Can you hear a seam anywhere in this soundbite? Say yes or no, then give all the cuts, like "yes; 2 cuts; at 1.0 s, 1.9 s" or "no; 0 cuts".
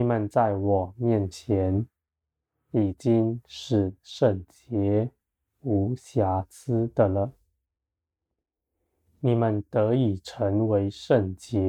no; 0 cuts